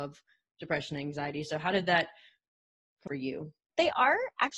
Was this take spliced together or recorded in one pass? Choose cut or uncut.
cut